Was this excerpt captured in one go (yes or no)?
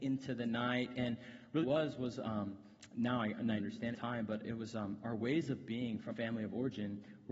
no